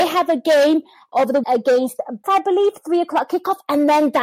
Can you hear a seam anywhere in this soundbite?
yes; 3 cuts; at 1.1 s, 1.4 s, 2.2 s

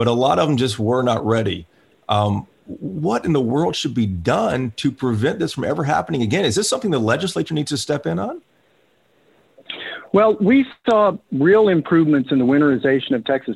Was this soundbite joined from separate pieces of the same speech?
no; 0 cuts

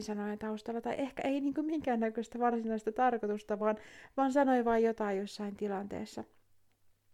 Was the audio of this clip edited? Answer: no; 0 cuts

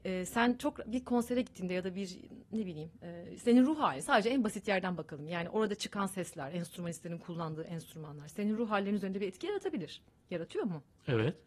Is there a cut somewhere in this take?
yes; 1 cut; at 10.1 s

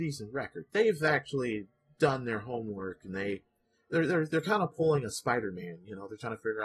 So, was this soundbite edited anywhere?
no; 0 cuts

